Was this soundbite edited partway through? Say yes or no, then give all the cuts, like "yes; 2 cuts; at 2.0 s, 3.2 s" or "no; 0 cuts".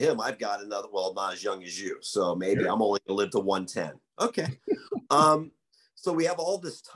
no; 0 cuts